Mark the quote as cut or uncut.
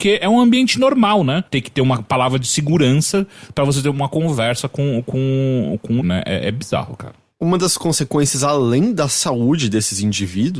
cut